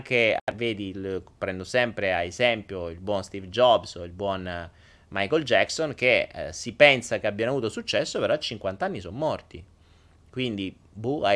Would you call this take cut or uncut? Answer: uncut